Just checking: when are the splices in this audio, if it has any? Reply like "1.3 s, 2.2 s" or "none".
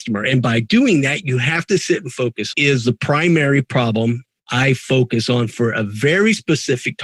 2.5 s